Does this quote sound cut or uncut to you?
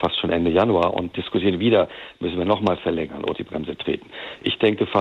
cut